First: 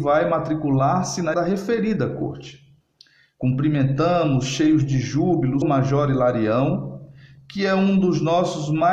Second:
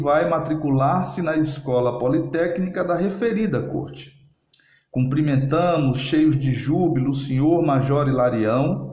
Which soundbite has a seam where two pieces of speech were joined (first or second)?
first